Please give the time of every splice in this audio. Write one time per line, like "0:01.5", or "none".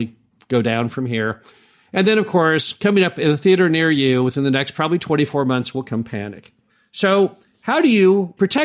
none